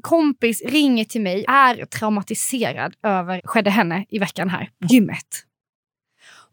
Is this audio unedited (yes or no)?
no